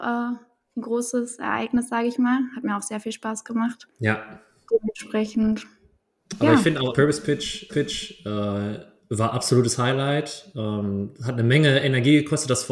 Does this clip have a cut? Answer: yes; 3 cuts; at 3.9 s, 6.9 s, 7.7 s

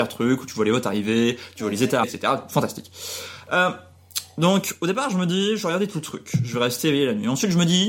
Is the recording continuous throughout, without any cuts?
no; 1 cut; at 2.0 s

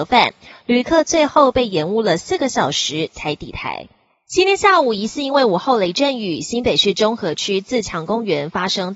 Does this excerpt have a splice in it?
no; 0 cuts

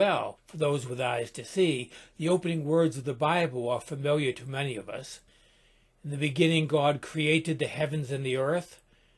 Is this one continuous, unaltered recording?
yes; 0 cuts

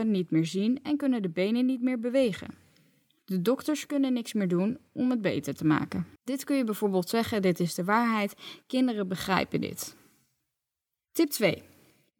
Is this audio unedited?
no; 1 cut; at 6.2 s

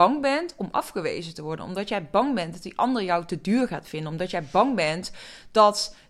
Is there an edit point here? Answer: no; 0 cuts

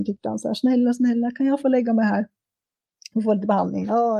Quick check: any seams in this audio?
no; 0 cuts

